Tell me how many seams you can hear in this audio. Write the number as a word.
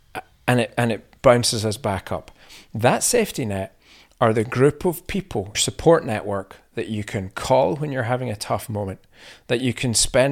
one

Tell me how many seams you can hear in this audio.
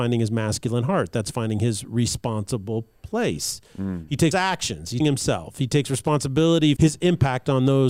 three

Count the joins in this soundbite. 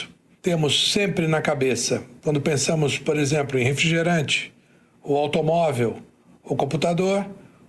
zero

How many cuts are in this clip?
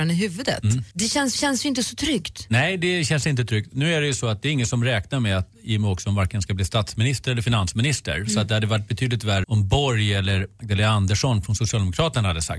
three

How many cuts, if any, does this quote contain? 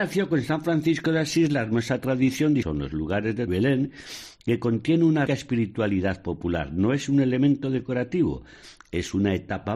three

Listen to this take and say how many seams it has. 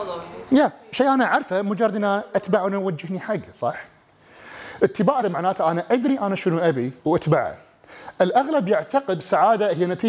three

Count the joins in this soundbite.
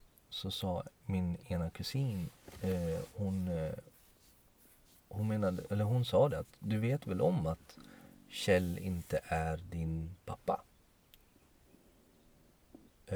zero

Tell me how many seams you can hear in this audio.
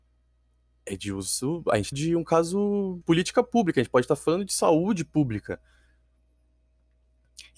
two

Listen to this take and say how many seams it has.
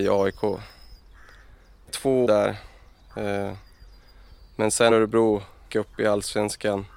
four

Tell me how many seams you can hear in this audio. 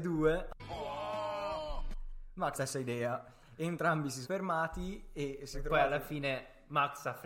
three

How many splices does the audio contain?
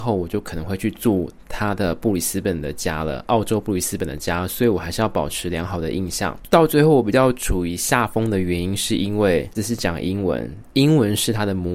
one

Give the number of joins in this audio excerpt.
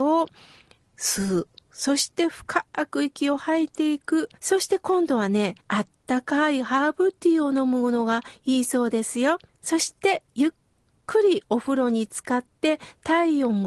three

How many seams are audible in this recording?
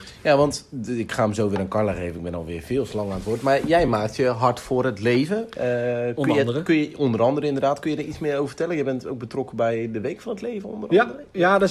zero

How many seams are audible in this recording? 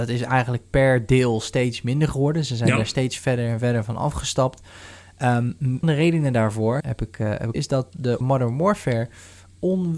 four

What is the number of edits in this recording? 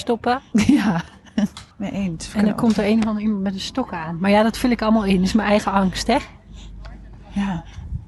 one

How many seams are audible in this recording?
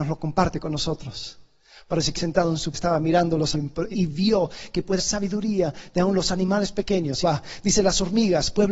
six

